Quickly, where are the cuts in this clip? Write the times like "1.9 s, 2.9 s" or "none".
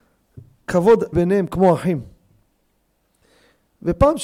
1.1 s